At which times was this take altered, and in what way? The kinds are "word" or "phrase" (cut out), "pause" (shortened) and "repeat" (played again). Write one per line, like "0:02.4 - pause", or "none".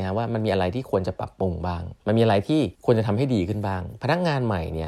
0:02.0 - pause
0:02.8 - pause